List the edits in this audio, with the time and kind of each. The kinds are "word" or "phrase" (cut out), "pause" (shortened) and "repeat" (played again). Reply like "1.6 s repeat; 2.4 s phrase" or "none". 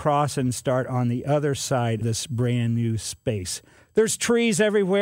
2.0 s word; 3.8 s pause